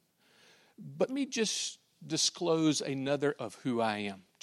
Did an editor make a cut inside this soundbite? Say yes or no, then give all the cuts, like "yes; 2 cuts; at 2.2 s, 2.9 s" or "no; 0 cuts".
yes; 2 cuts; at 1.1 s, 3.4 s